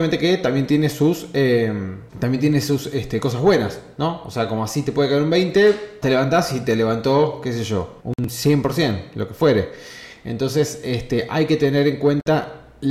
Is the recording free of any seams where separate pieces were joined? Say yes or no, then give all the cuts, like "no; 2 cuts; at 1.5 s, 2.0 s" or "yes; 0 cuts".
no; 3 cuts; at 2.1 s, 6.0 s, 8.0 s